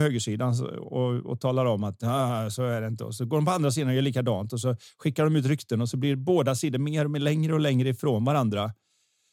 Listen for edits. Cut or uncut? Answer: uncut